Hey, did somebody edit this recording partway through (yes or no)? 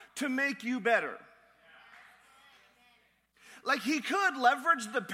no